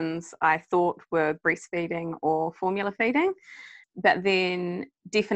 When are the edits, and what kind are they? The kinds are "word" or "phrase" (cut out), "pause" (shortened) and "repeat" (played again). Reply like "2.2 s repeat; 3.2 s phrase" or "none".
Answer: 3.8 s word